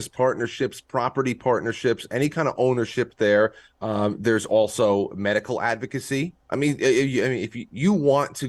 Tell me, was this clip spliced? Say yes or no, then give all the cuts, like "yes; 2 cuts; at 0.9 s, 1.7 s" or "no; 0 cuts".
yes; 1 cut; at 6.4 s